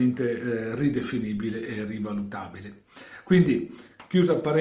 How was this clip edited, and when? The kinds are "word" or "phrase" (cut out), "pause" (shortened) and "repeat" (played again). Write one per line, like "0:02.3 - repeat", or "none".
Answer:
none